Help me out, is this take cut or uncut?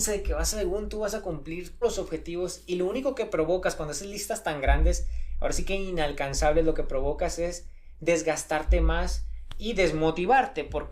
cut